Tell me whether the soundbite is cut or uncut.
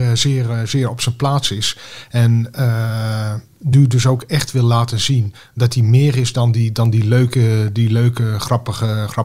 uncut